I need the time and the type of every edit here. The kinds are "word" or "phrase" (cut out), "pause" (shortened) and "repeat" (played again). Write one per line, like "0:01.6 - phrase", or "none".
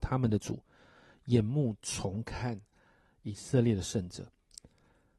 none

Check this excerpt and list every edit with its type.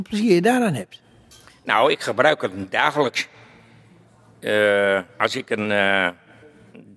0:05.1 - pause

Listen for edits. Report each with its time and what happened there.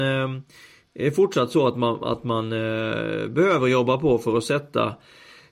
none

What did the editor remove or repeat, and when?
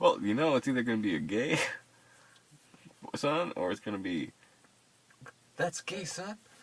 none

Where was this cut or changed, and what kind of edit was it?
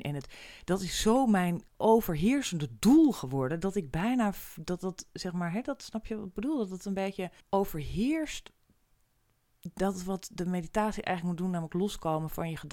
0:01.7 - pause
0:07.4 - pause

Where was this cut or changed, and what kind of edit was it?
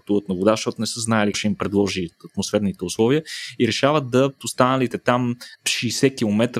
0:01.3 - word
0:04.4 - word
0:05.5 - word

